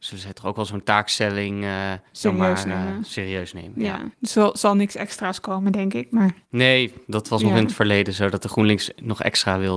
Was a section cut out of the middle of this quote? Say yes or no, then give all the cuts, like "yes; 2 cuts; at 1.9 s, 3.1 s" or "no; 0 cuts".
yes; 2 cuts; at 2.1 s, 4.1 s